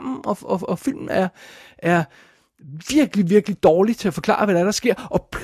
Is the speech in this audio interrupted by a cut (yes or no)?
no